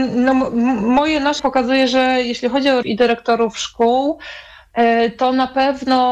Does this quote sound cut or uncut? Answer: cut